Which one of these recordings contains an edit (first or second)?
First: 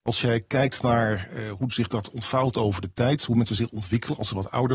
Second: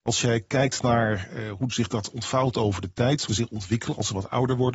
second